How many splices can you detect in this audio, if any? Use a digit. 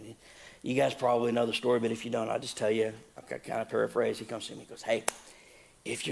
0